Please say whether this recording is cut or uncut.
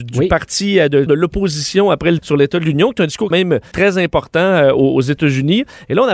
cut